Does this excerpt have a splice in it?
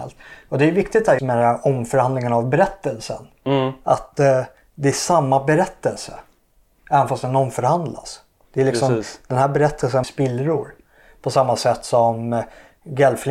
yes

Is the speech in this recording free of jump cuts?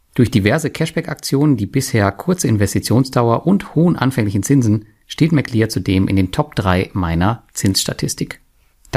yes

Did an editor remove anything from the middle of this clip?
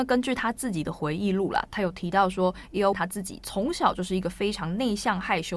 yes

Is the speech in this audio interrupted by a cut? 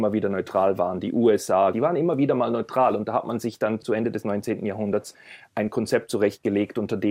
yes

